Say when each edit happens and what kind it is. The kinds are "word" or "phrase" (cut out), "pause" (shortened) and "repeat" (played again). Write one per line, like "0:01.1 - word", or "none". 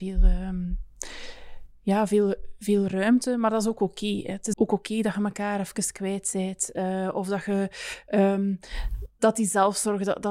0:04.5 - word